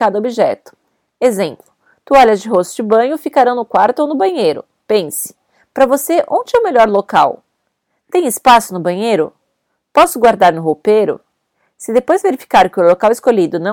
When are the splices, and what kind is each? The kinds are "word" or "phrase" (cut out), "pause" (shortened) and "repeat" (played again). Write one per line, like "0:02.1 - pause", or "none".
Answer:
none